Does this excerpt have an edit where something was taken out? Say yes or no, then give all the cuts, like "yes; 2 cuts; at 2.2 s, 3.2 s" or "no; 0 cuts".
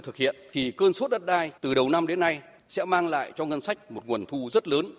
yes; 1 cut; at 1.6 s